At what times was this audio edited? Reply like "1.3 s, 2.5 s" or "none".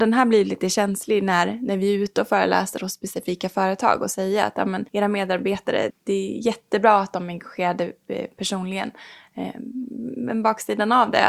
4.9 s, 5.9 s